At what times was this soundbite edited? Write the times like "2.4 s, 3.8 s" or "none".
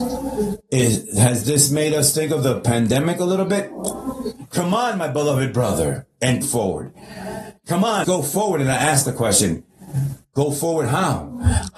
6.4 s, 8.0 s